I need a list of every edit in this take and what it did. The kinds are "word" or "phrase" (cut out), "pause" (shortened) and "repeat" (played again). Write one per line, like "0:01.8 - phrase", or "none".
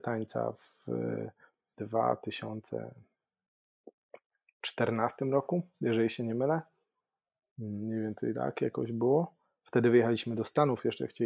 0:01.7 - word